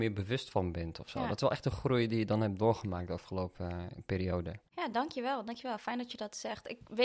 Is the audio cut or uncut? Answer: uncut